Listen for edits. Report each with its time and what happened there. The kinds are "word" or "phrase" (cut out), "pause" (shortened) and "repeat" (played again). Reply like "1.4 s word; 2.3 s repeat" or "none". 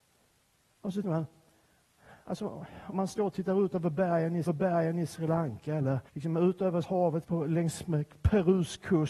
1.0 s word; 2.9 s word; 4.5 s repeat; 6.1 s pause; 6.8 s word; 7.2 s word